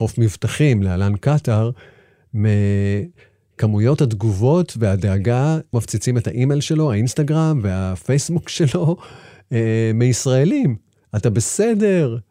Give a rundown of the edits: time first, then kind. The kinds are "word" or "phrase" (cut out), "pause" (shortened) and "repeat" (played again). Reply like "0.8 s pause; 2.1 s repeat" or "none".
5.7 s word

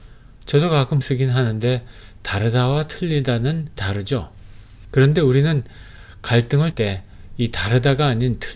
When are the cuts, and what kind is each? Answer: 1.0 s word; 3.8 s word; 6.7 s word

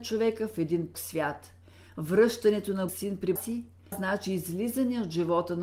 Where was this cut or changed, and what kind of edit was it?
0.9 s word; 1.6 s pause; 2.9 s word; 3.4 s word; 3.9 s word

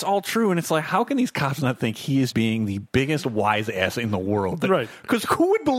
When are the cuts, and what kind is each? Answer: 2.3 s word

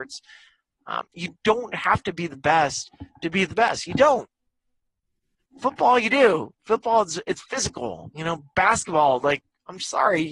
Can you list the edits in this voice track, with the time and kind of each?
1.1 s pause

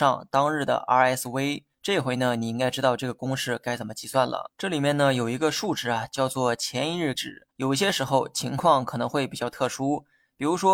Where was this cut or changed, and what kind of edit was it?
1.7 s pause; 4.5 s pause; 7.1 s word; 7.5 s pause

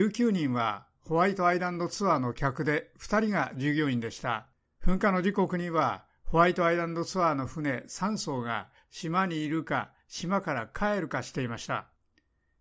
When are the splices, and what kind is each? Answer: 4.7 s pause

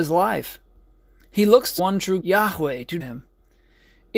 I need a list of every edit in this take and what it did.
1.8 s word; 2.2 s word; 3.0 s word

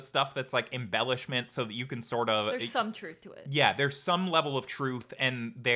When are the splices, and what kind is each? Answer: none

